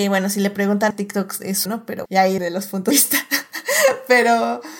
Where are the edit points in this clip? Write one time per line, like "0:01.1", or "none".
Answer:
0:00.9
0:01.7
0:02.1
0:02.4
0:02.9